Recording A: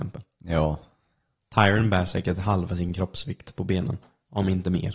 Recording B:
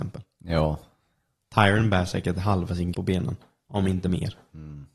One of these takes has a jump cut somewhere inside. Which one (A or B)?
B